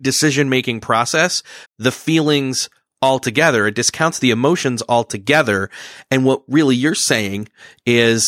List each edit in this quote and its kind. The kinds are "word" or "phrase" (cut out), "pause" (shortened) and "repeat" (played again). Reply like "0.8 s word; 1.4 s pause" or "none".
1.6 s phrase